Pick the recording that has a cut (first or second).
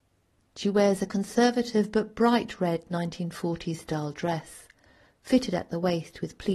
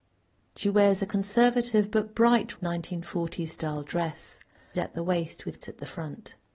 second